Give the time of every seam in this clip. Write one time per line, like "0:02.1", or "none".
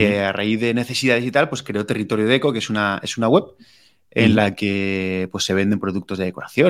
none